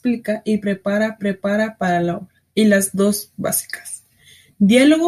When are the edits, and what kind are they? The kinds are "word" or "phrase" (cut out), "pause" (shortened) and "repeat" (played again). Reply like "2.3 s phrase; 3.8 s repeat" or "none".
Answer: 1.2 s repeat; 2.5 s pause